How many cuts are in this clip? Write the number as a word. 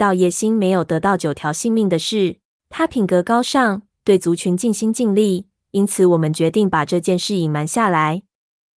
one